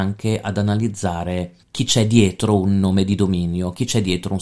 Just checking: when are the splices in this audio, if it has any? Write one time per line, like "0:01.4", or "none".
0:01.6